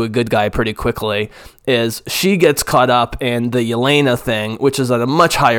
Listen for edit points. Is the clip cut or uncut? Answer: uncut